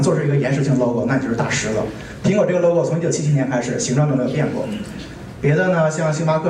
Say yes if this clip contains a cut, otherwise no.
no